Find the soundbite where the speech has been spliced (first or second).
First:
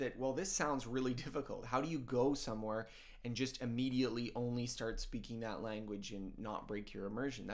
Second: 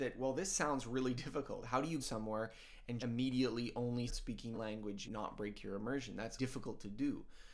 second